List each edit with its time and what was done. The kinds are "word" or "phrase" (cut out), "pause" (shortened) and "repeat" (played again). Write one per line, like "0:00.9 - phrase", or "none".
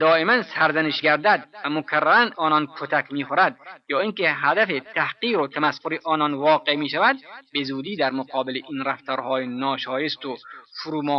0:01.0 - word
0:02.3 - word